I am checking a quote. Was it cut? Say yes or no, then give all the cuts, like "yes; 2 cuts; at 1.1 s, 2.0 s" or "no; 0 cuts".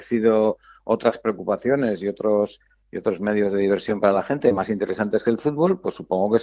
no; 0 cuts